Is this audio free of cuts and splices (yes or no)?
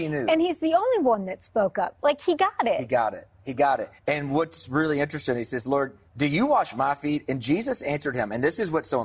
no